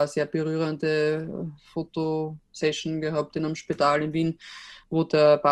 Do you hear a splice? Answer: no; 0 cuts

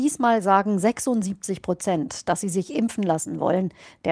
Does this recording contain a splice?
no; 0 cuts

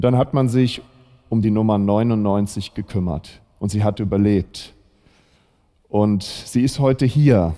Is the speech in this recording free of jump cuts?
yes; 0 cuts

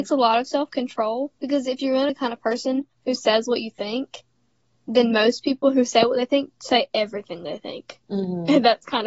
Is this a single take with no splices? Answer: no; 2 cuts; at 1.3 s, 2.1 s

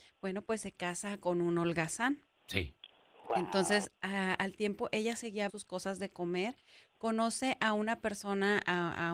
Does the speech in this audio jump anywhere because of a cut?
yes; 1 cut; at 5.5 s

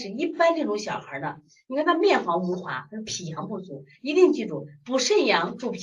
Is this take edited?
no; 0 cuts

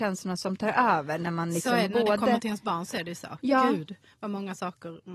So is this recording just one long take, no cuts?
yes; 0 cuts

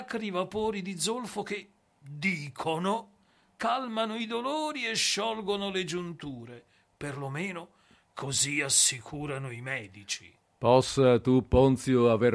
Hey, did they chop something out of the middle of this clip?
no; 0 cuts

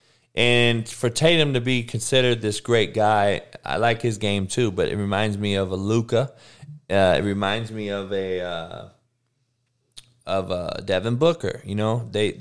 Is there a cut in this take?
no; 0 cuts

